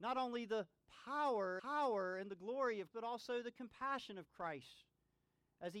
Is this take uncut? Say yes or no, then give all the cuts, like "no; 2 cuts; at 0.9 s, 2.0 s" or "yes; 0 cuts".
no; 2 cuts; at 1.6 s, 2.9 s